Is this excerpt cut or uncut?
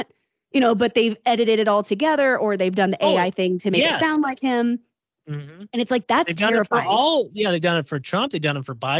uncut